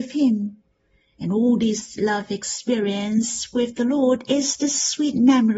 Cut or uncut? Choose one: uncut